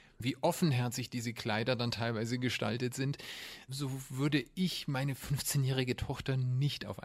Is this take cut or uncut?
uncut